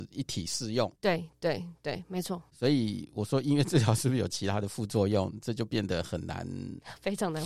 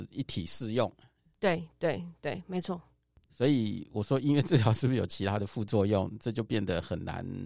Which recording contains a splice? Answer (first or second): first